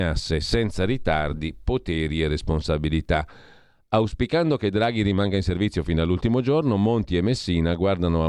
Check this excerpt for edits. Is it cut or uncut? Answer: uncut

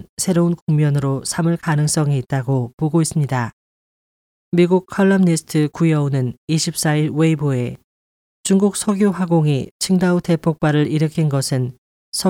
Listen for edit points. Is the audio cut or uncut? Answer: uncut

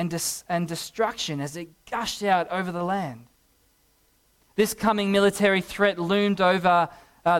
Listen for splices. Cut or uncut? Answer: uncut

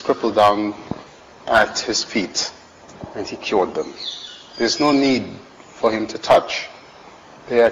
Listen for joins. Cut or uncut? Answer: uncut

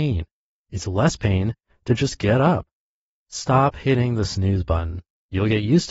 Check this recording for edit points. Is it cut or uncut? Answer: uncut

